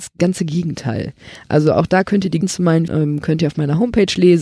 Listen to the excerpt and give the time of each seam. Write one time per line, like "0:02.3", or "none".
0:02.4
0:02.9